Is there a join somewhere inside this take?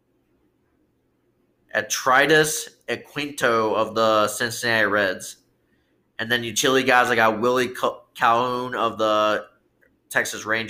no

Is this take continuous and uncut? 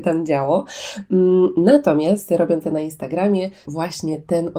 no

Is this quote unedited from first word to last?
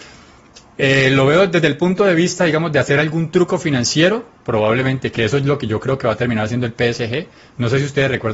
yes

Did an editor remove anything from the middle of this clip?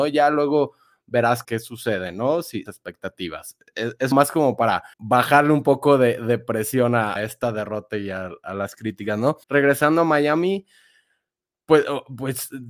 yes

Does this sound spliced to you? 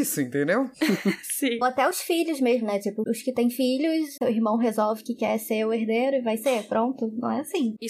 no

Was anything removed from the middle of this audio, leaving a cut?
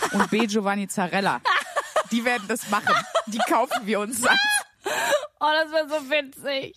yes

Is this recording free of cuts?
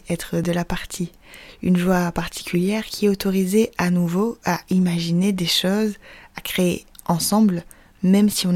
yes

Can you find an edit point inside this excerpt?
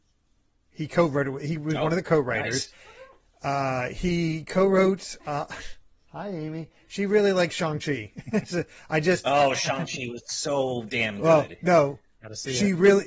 no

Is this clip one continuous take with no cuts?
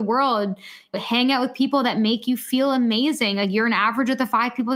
no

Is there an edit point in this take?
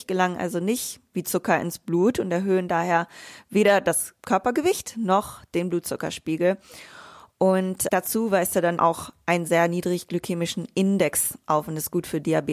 yes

